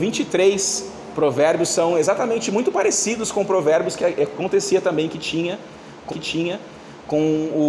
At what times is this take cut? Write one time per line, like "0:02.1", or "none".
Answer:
0:06.1